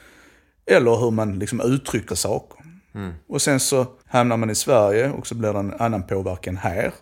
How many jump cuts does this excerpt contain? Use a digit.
2